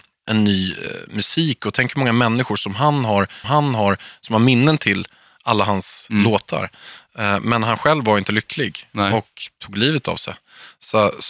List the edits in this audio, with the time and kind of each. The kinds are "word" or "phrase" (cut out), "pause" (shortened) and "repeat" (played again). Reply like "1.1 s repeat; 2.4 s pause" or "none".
3.4 s repeat